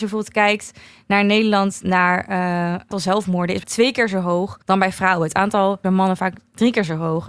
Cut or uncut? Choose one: cut